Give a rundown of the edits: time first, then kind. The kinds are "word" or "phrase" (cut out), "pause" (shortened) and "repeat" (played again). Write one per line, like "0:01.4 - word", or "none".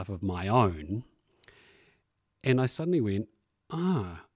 none